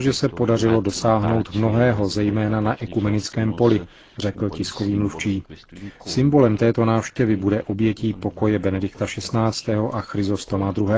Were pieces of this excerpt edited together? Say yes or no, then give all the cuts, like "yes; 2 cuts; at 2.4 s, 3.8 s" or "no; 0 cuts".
no; 0 cuts